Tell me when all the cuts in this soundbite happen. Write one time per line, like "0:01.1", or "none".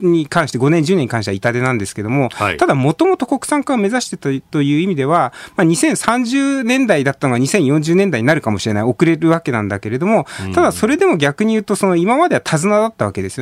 none